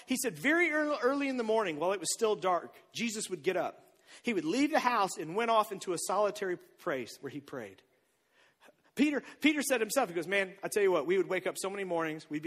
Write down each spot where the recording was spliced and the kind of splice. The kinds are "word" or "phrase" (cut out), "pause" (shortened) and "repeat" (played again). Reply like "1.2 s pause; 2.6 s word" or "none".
7.2 s word